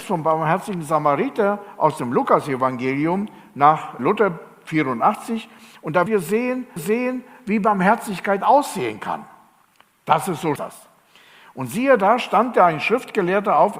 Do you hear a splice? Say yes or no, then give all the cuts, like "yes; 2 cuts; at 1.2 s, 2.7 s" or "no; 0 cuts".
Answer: yes; 4 cuts; at 4.0 s, 6.1 s, 6.8 s, 10.6 s